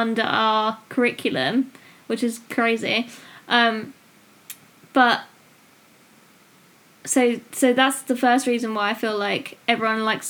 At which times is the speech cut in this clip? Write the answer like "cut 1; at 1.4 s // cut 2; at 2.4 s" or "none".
none